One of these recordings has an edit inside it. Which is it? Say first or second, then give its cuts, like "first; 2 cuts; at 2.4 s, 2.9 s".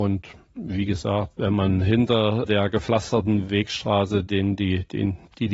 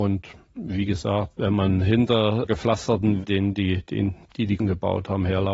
second; 3 cuts; at 2.5 s, 3.2 s, 4.6 s